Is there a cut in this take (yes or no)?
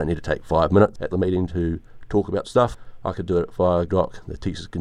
yes